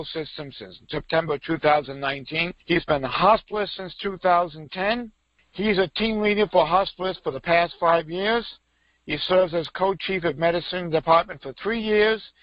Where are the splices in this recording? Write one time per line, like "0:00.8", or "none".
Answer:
none